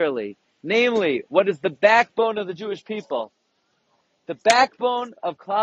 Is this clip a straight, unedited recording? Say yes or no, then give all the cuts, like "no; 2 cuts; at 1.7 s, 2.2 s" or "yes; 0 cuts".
yes; 0 cuts